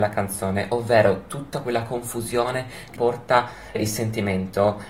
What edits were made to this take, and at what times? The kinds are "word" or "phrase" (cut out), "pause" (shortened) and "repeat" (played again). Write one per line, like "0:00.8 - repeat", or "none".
0:01.6 - word
0:02.9 - word
0:03.7 - word